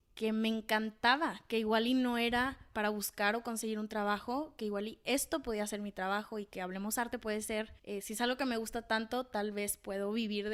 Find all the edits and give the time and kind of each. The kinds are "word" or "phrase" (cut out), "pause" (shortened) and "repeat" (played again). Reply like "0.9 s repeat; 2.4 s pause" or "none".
2.7 s word; 7.8 s pause